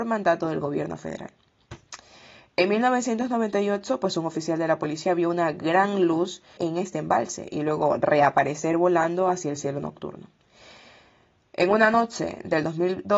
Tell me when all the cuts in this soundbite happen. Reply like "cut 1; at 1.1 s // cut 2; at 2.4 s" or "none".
cut 1; at 6.6 s